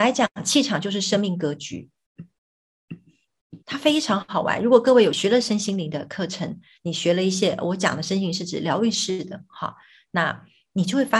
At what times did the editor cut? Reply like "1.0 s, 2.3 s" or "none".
3.6 s